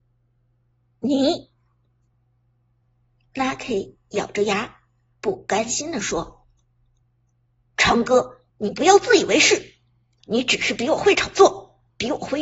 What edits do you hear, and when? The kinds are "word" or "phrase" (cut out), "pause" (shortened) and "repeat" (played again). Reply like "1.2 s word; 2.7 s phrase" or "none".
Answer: none